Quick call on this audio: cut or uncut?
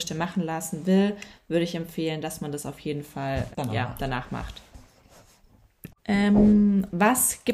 cut